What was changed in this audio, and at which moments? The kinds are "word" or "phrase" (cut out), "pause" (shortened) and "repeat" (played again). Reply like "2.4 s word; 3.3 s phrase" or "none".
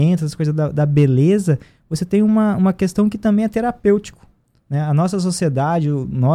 none